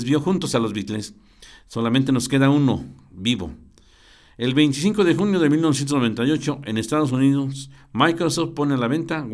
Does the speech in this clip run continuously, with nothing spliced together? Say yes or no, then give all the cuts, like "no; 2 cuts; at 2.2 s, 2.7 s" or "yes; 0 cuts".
yes; 0 cuts